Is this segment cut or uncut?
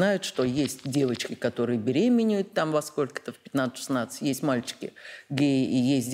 uncut